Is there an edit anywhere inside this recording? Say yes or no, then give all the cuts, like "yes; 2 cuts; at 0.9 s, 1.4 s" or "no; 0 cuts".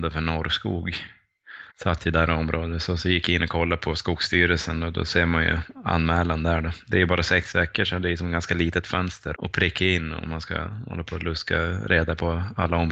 yes; 2 cuts; at 1.7 s, 9.3 s